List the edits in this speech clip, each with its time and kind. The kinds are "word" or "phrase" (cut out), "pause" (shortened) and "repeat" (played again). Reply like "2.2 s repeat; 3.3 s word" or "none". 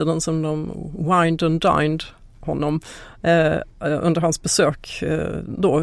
none